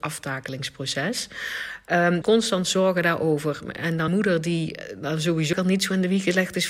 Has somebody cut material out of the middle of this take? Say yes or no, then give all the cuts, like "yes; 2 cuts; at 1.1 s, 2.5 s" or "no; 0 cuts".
yes; 3 cuts; at 2.2 s, 4.1 s, 5.5 s